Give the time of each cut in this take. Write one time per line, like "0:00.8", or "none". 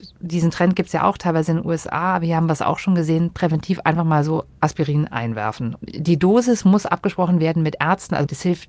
none